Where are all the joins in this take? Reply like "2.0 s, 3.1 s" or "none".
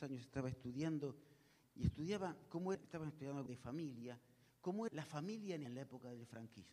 1.6 s, 2.7 s, 3.5 s, 4.9 s, 5.7 s

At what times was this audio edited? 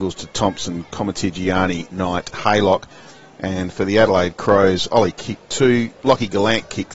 2.3 s, 5.1 s, 6.0 s

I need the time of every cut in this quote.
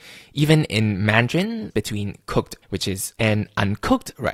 1.7 s, 2.6 s, 3.2 s

